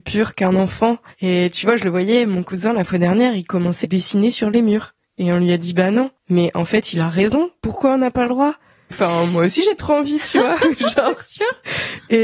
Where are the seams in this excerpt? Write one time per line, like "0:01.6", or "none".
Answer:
0:03.8
0:06.2
0:08.9